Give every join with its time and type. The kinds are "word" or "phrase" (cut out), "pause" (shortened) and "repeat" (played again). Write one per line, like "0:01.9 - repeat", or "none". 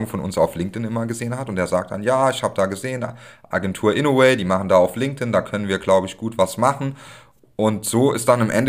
none